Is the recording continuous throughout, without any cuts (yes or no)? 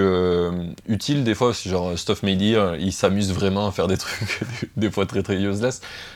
yes